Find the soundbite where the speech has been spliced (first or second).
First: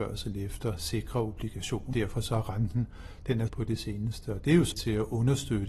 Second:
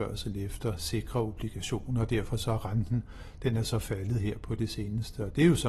first